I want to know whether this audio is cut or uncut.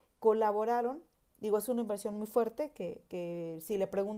uncut